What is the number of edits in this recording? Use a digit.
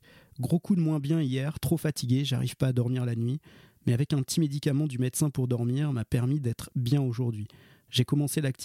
0